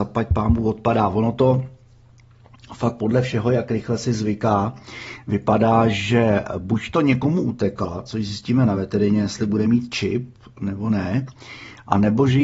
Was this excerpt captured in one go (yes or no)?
yes